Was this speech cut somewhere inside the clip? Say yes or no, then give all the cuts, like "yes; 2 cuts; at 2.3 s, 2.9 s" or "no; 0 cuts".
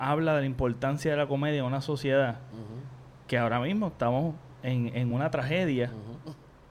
no; 0 cuts